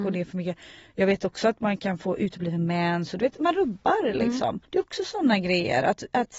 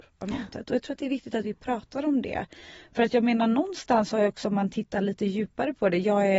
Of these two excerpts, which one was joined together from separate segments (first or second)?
first